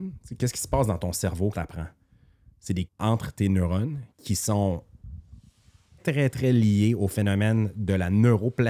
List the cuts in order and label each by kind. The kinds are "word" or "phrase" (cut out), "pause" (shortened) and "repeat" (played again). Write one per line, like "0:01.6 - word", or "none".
0:01.5 - word
0:02.9 - word
0:04.1 - pause
0:06.0 - word

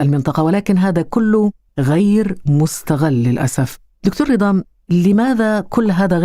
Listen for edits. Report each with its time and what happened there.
none

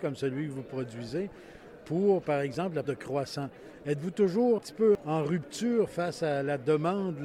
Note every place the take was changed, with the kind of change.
0:02.8 - word
0:04.6 - word

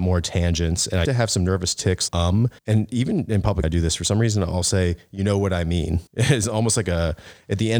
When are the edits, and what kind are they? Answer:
0:01.0 - word
0:02.1 - word
0:02.6 - pause
0:03.6 - word
0:06.1 - pause

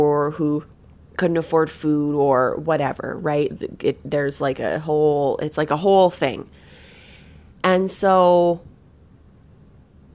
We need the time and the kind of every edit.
none

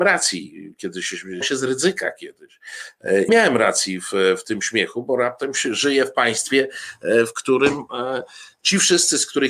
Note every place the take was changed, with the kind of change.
0:01.4 - word
0:03.3 - phrase

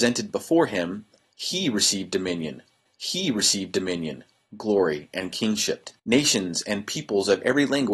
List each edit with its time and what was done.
0:02.8 - repeat
0:06.0 - pause

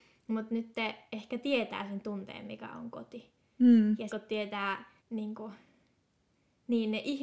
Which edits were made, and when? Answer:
0:04.1 - word
0:05.0 - pause

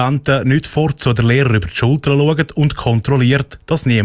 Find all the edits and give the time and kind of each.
none

